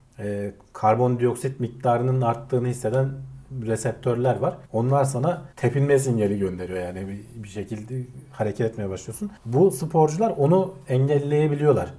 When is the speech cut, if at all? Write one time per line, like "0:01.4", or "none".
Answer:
0:04.7
0:05.5
0:09.4